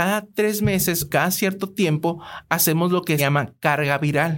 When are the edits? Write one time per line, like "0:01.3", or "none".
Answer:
0:01.1
0:03.2